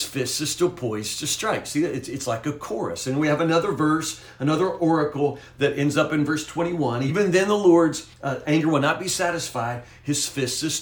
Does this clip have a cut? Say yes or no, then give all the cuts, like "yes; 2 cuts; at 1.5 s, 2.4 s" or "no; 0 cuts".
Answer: yes; 1 cut; at 8.1 s